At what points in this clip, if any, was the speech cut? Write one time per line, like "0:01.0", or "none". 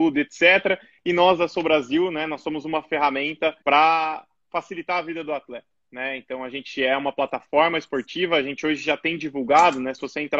0:03.6